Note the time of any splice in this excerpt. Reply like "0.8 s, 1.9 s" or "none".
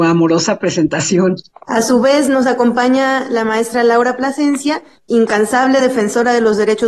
none